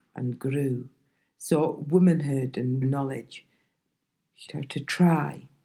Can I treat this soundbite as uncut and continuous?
no; 2 cuts; at 2.8 s, 4.5 s

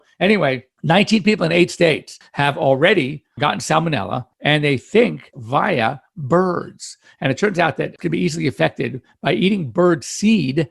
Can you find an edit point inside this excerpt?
yes; 2 cuts; at 5.3 s, 8.0 s

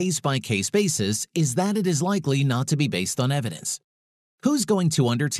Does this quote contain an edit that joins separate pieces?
no; 0 cuts

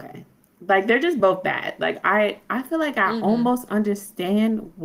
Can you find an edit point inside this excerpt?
no; 0 cuts

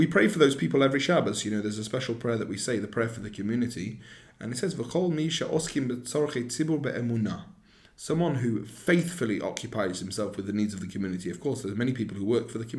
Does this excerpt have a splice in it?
no; 0 cuts

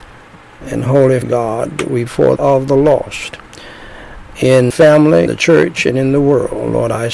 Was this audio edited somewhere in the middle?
yes; 5 cuts; at 1.2 s, 2.1 s, 2.4 s, 4.7 s, 5.3 s

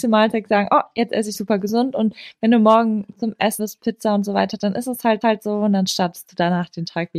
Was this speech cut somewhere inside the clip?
yes; 3 cuts; at 1.3 s, 3.6 s, 5.2 s

